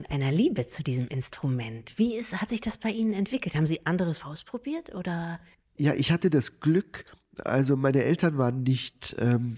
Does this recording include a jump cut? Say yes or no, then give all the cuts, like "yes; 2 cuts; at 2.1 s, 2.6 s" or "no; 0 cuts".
yes; 1 cut; at 4.2 s